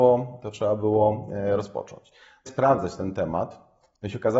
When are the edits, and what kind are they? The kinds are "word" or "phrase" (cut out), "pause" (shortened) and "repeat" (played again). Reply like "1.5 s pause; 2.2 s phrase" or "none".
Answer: 2.5 s phrase